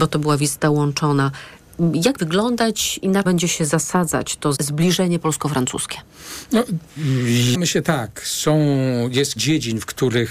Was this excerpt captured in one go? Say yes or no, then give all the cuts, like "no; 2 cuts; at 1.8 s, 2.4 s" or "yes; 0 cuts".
no; 5 cuts; at 2.2 s, 3.2 s, 4.5 s, 7.5 s, 9.4 s